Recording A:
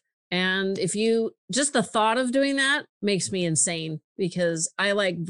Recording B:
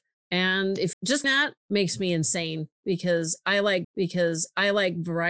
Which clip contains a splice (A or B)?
B